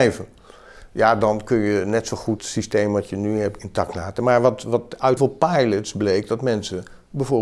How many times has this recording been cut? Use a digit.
3